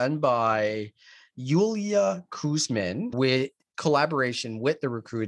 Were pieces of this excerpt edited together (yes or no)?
no